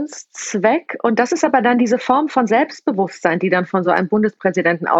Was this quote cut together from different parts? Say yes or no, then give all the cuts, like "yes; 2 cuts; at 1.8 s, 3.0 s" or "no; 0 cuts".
no; 0 cuts